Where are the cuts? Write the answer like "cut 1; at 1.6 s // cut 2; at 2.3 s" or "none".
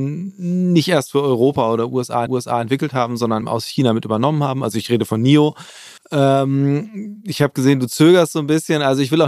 cut 1; at 2.3 s // cut 2; at 3.4 s // cut 3; at 6.0 s